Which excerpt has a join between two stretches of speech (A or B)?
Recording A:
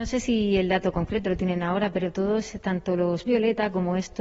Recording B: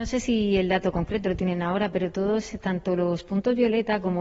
A